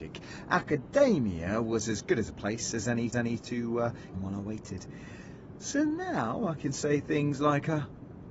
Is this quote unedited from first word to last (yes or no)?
no